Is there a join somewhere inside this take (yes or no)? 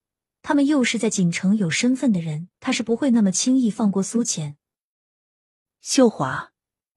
yes